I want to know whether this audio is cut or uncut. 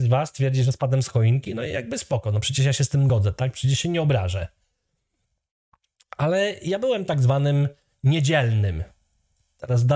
uncut